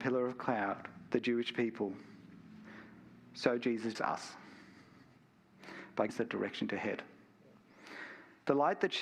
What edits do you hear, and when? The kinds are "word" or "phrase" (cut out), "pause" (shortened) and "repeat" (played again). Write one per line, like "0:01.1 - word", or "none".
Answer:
0:01.1 - word
0:03.9 - word
0:06.1 - word